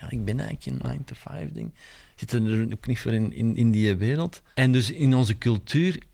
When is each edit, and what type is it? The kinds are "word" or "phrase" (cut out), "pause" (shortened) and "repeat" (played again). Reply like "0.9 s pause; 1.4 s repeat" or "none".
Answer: none